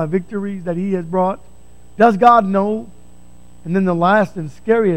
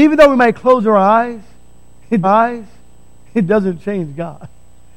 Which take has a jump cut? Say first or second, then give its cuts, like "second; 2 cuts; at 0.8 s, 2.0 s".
second; 1 cut; at 2.2 s